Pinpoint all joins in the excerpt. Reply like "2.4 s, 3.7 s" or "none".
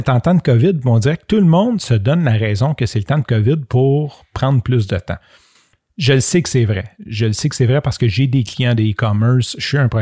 none